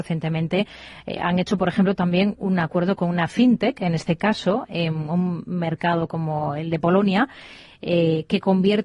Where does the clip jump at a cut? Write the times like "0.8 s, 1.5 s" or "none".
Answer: none